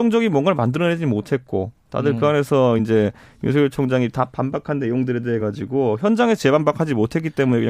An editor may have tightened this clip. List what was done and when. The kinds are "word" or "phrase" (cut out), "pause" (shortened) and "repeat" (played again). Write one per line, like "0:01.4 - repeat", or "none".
none